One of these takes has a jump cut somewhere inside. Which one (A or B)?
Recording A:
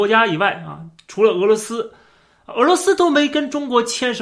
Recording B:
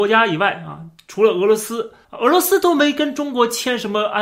B